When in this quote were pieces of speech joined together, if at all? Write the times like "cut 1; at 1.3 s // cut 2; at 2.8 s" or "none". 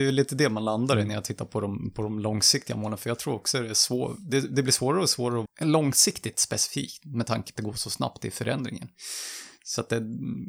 cut 1; at 5.5 s // cut 2; at 7.6 s